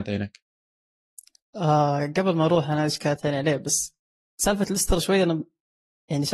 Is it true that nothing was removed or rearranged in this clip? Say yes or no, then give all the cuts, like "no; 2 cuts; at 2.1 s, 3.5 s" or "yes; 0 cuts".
yes; 0 cuts